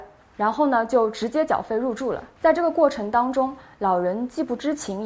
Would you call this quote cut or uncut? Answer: cut